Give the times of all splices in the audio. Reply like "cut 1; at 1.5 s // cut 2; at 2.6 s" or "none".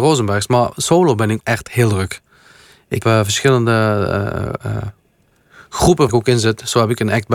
cut 1; at 1.4 s // cut 2; at 3.0 s // cut 3; at 6.1 s